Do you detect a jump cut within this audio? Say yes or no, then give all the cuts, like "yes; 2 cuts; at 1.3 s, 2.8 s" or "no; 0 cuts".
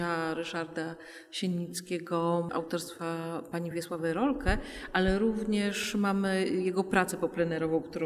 no; 0 cuts